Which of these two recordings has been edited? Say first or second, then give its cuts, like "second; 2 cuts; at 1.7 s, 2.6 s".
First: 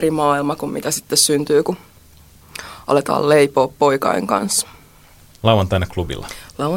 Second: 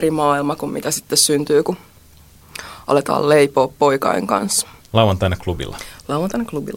second; 1 cut; at 4.8 s